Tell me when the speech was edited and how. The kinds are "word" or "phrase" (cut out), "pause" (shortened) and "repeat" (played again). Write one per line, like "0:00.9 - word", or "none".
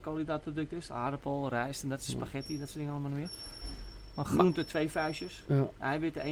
none